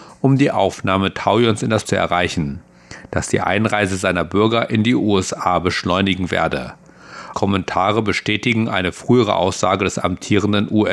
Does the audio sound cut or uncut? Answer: cut